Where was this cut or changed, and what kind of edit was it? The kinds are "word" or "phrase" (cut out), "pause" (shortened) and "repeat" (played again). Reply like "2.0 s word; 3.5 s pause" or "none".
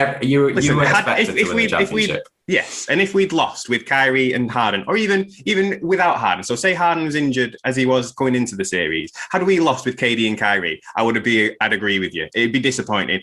none